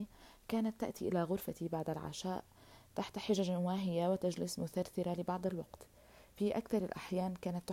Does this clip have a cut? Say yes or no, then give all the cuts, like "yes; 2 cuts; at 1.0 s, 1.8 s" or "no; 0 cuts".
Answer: no; 0 cuts